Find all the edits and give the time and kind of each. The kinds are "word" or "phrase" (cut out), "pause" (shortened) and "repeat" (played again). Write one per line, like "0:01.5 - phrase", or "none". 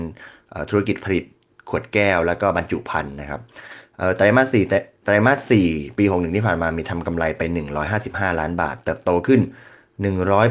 none